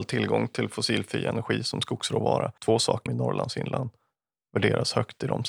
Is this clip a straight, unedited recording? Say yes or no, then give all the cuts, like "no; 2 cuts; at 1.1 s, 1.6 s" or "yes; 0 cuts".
no; 2 cuts; at 2.6 s, 3.1 s